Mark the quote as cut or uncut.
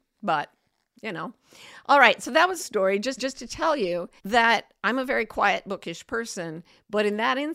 cut